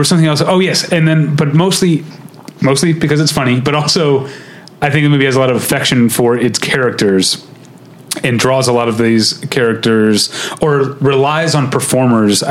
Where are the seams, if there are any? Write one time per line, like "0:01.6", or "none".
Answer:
none